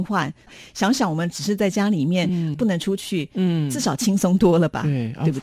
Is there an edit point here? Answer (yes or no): no